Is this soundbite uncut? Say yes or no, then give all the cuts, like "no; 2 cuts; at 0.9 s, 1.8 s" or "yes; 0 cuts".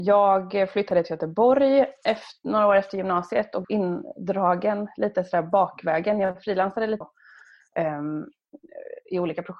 no; 2 cuts; at 3.6 s, 7.0 s